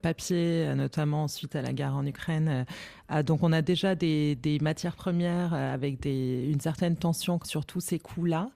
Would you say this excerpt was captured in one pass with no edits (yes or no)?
no